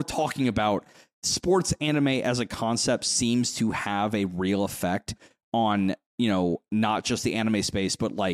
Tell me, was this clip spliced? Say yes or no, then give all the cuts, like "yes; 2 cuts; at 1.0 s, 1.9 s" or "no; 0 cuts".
no; 0 cuts